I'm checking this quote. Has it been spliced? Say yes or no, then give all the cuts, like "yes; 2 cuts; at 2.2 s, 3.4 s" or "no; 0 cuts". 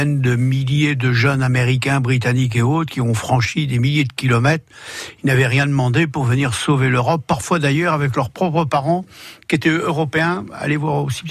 no; 0 cuts